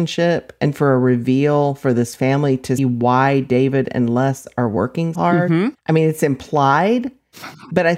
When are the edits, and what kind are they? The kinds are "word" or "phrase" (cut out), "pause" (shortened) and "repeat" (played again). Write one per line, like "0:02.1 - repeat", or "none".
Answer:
0:02.8 - word
0:05.1 - word
0:05.8 - pause